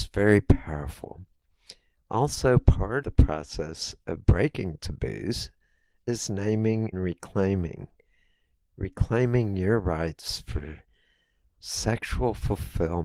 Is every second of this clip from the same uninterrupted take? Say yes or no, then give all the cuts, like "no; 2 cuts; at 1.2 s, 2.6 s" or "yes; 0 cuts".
no; 2 cuts; at 3.0 s, 6.9 s